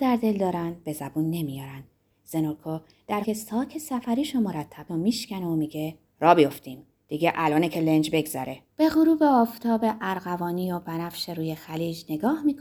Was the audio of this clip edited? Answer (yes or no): yes